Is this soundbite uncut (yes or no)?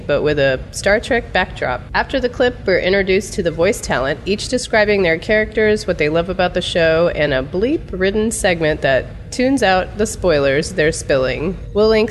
yes